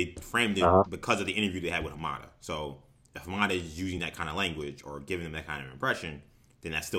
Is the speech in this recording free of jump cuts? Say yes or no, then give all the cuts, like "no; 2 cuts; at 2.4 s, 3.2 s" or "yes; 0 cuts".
yes; 0 cuts